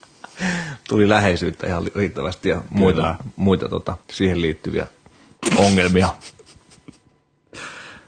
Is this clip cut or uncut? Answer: cut